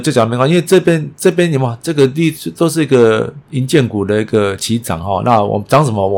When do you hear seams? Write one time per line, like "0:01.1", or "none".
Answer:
none